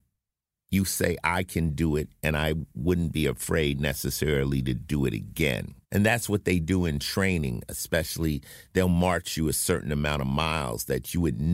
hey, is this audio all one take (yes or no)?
no